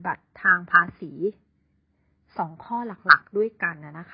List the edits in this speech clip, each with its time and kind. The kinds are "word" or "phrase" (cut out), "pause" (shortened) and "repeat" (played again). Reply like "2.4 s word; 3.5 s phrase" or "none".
none